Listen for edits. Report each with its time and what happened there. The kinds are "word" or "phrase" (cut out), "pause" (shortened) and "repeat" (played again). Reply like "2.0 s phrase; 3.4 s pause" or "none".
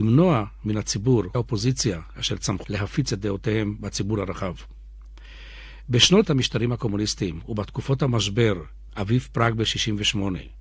1.3 s word; 2.6 s word; 6.2 s word; 8.9 s word